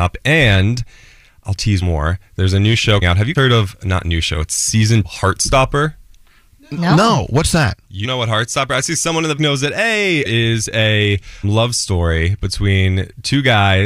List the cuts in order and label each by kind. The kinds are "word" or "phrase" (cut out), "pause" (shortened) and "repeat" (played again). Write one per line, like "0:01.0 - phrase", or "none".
0:01.8 - word
0:03.0 - word
0:03.4 - word
0:05.0 - word
0:08.0 - word
0:09.4 - word
0:10.3 - word
0:11.4 - word